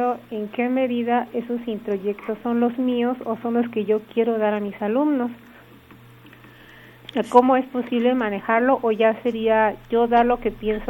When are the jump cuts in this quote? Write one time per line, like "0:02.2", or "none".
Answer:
none